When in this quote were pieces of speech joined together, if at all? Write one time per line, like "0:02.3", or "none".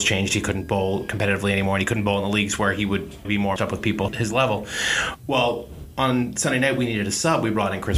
0:03.2
0:03.6
0:04.1